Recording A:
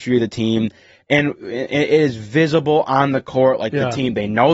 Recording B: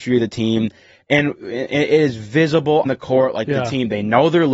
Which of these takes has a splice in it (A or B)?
B